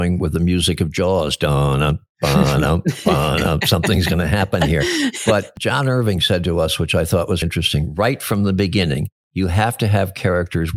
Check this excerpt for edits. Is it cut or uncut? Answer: cut